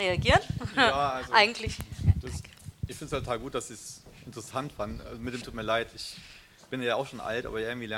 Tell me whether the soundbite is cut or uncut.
cut